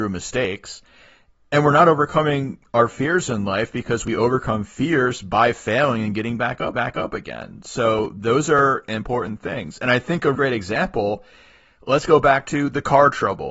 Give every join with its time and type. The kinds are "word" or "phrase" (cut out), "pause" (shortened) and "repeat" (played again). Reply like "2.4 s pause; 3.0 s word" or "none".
6.7 s repeat; 10.3 s word